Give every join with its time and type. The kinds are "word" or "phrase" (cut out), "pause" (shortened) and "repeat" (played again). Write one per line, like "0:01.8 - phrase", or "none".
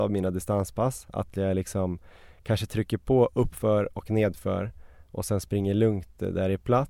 none